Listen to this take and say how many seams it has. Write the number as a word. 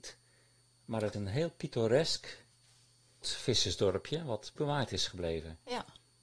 three